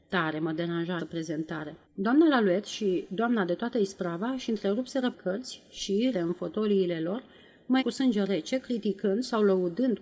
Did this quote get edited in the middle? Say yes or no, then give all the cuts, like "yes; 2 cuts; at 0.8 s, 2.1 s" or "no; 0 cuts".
yes; 5 cuts; at 1.0 s, 1.8 s, 5.1 s, 6.1 s, 7.8 s